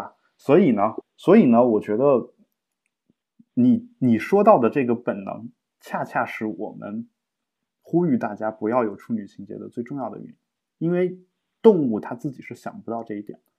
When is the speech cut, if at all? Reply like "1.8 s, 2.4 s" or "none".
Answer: 1.0 s

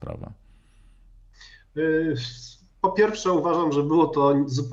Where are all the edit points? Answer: none

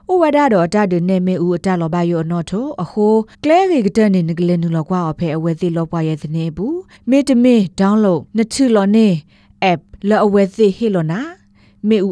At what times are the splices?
3.3 s, 7.0 s, 8.3 s, 10.0 s

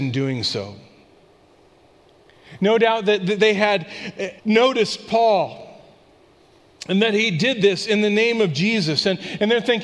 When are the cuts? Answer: 4.4 s

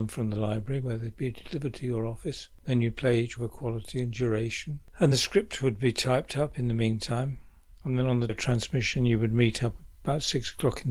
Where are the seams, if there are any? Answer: 3.4 s, 5.1 s, 8.3 s

